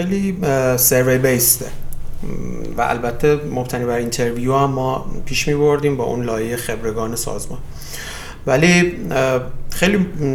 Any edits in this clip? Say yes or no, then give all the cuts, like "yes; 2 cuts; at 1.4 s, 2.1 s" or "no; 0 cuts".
no; 0 cuts